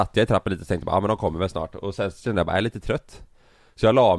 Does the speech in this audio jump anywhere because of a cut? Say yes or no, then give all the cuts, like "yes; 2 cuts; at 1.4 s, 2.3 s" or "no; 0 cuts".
no; 0 cuts